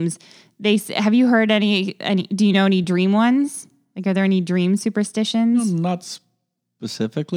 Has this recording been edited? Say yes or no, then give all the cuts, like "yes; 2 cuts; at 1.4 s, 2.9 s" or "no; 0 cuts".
no; 0 cuts